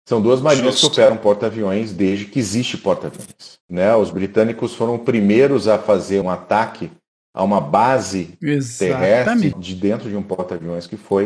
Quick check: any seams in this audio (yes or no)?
yes